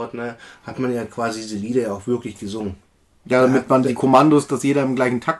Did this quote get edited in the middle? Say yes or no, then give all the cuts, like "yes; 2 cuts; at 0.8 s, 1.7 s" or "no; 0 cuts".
no; 0 cuts